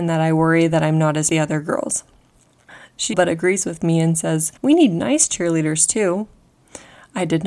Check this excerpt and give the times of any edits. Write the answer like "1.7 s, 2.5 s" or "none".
1.3 s, 3.1 s, 4.6 s